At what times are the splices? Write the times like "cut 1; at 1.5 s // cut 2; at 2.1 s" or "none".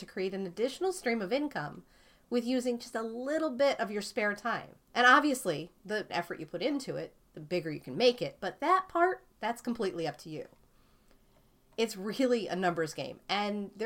cut 1; at 4.9 s // cut 2; at 6.1 s